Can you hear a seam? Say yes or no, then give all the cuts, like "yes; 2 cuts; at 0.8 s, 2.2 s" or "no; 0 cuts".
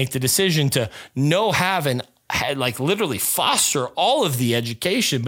no; 0 cuts